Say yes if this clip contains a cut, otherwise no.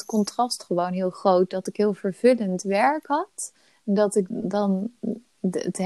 yes